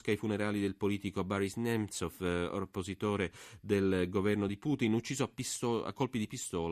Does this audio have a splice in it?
no; 0 cuts

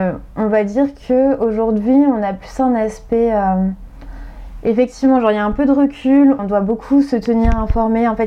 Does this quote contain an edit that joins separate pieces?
yes; 1 cut; at 6.4 s

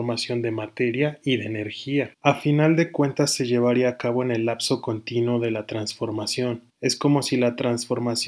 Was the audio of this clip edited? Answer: yes; 2 cuts; at 2.1 s, 6.7 s

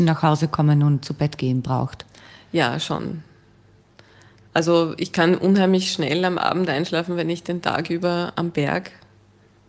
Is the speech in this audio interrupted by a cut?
yes; 1 cut; at 8.3 s

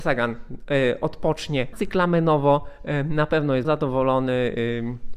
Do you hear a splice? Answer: yes; 2 cuts; at 1.7 s, 3.6 s

